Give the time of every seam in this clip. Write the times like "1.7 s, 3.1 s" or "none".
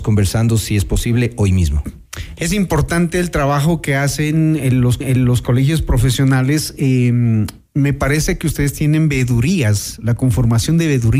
5.0 s

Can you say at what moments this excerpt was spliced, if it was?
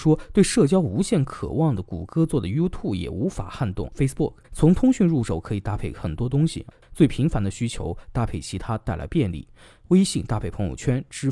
4.4 s

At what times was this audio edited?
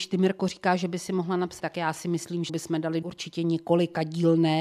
1.6 s, 2.5 s, 3.0 s

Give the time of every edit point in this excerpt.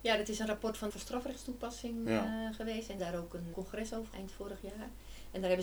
0.9 s, 3.0 s, 3.5 s, 4.1 s

